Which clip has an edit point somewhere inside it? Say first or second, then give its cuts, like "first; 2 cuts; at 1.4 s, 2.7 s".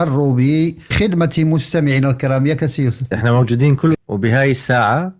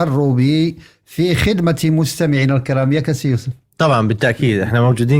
first; 3 cuts; at 0.9 s, 3.1 s, 3.9 s